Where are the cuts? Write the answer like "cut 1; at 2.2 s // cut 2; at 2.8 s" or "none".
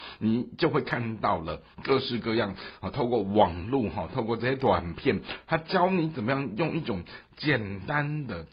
cut 1; at 1.7 s